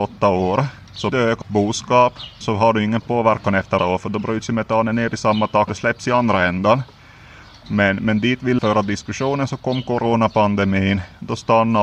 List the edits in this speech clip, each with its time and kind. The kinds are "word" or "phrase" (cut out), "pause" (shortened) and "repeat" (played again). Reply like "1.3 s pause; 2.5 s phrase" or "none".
1.1 s word; 1.4 s word; 2.4 s word; 3.0 s word; 3.8 s word; 5.7 s word; 8.6 s word